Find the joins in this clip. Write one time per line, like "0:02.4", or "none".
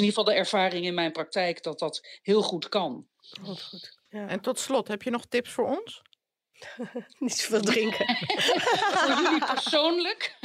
0:04.1